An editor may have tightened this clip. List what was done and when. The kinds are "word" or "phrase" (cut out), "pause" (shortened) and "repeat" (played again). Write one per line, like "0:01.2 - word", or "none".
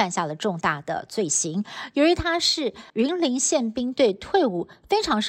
0:02.9 - pause